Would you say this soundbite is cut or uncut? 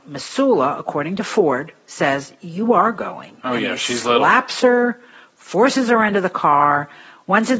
uncut